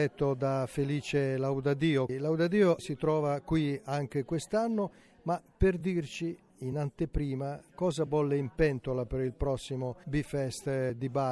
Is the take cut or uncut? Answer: uncut